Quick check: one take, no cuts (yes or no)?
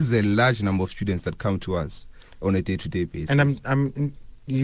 yes